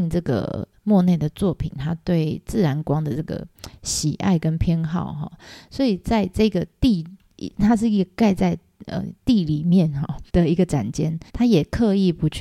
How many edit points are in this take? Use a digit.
2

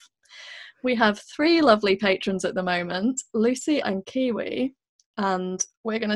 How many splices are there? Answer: 1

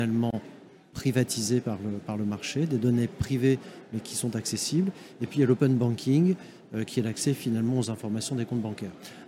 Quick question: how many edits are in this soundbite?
0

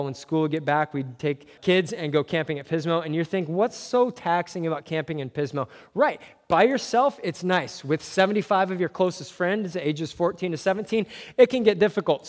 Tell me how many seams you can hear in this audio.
1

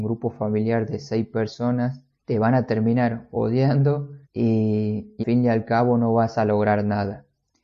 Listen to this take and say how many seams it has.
2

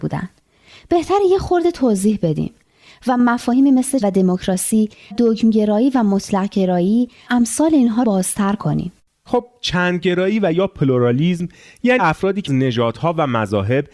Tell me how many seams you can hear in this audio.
6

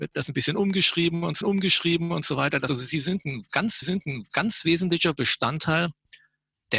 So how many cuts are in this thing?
3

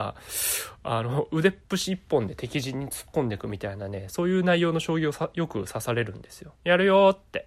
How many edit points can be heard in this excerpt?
2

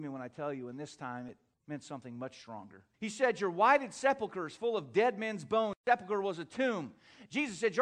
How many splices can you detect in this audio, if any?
2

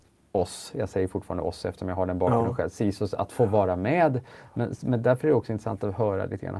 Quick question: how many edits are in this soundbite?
0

